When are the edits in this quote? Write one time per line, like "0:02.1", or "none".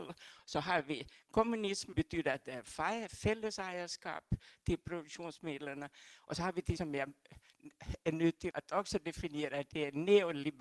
0:01.9
0:06.8
0:08.5